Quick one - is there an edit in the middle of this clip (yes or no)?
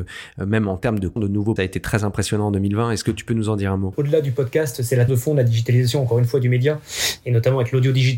yes